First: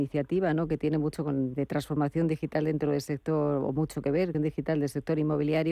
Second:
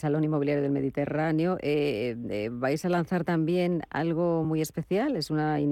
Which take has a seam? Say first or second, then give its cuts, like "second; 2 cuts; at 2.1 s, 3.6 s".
first; 2 cuts; at 1.5 s, 4.3 s